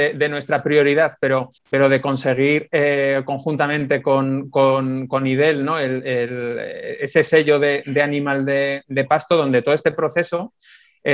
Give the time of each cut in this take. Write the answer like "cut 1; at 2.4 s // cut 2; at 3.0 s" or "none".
cut 1; at 1.6 s